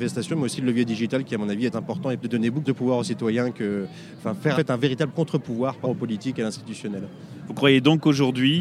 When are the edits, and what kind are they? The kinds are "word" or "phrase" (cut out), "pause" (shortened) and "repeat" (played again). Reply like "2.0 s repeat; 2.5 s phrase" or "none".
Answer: 1.7 s word; 2.2 s word; 2.7 s word; 4.2 s word; 4.5 s word; 5.8 s word

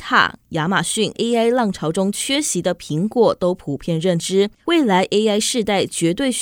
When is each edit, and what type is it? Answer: 1.1 s phrase; 4.6 s pause

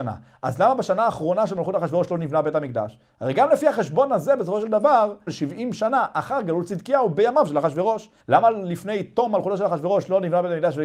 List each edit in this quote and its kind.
5.3 s word; 8.2 s pause

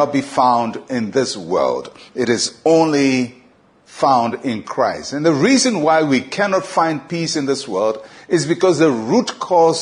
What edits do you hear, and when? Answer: none

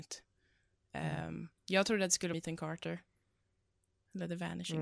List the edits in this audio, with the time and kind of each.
1.6 s pause; 2.3 s phrase

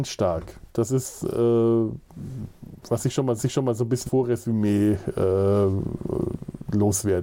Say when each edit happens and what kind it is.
3.4 s repeat; 4.1 s word

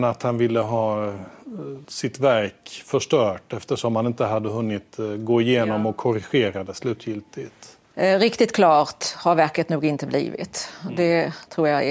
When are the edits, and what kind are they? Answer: 1.8 s pause

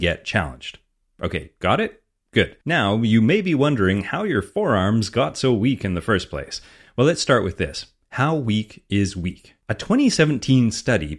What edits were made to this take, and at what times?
2.6 s pause; 9.6 s pause

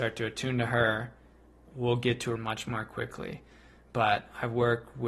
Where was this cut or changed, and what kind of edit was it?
1.7 s word; 2.4 s word

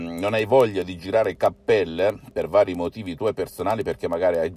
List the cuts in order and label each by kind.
none

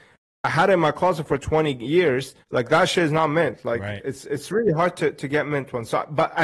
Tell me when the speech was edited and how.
2.4 s pause

